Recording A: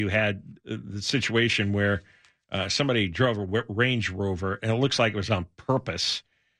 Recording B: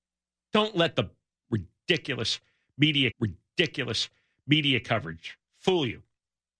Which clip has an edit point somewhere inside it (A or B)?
B